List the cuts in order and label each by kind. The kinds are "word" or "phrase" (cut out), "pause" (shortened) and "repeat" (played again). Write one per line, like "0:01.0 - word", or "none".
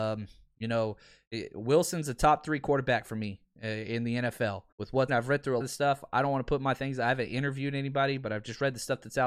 0:04.7 - pause
0:05.1 - word
0:05.6 - word